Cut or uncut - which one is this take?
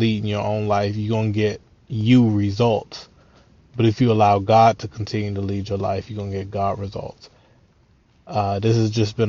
uncut